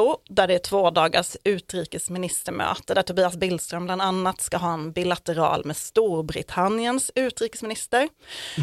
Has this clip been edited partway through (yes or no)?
no